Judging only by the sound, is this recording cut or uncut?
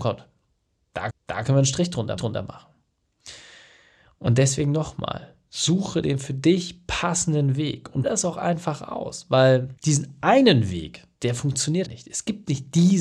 cut